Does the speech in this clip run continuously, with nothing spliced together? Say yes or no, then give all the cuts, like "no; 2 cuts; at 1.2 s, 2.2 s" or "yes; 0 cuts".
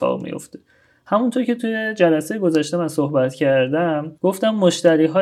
no; 1 cut; at 4.2 s